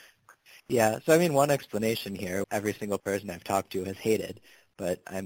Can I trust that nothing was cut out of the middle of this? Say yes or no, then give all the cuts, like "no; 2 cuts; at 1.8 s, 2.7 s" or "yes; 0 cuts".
no; 1 cut; at 2.4 s